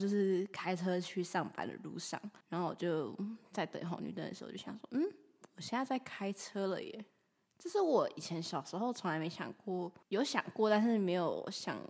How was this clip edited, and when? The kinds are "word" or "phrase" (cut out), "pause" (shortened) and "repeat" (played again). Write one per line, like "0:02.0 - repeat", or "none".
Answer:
0:02.4 - pause
0:07.1 - pause
0:10.0 - pause